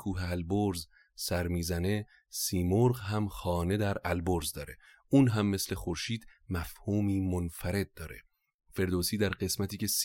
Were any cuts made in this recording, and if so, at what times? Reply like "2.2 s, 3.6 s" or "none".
none